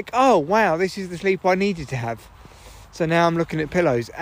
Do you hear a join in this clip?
no; 0 cuts

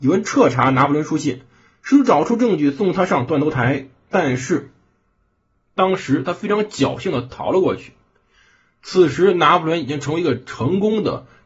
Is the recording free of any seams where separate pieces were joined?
yes; 0 cuts

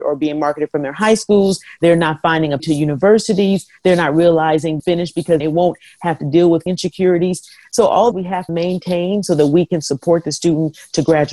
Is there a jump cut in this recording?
yes; 6 cuts; at 2.6 s, 4.8 s, 5.4 s, 6.7 s, 8.1 s, 8.5 s

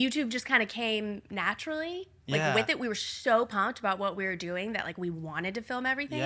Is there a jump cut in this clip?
no; 0 cuts

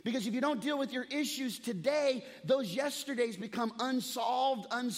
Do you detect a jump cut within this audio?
no; 0 cuts

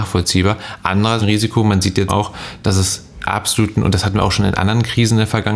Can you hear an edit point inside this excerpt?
yes; 2 cuts; at 1.2 s, 2.1 s

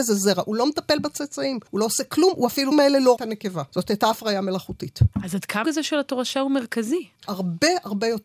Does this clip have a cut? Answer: yes; 7 cuts; at 1.7 s, 2.7 s, 3.2 s, 3.7 s, 5.1 s, 5.6 s, 7.2 s

